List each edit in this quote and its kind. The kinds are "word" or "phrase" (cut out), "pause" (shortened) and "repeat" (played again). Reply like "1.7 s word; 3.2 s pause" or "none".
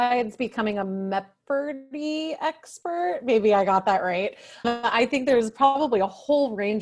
4.6 s word